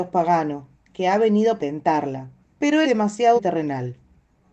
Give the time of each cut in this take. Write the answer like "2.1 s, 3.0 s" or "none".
1.6 s, 2.4 s, 2.8 s, 3.4 s